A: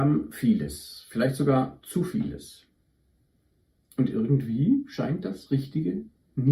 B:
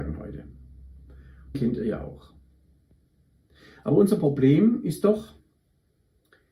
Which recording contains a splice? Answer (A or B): B